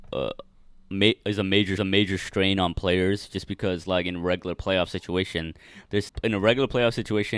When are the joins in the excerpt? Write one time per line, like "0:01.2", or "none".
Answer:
0:01.8
0:06.1